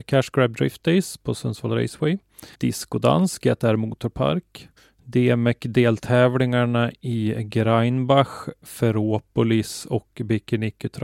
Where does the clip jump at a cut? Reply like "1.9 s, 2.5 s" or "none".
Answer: 2.5 s, 4.8 s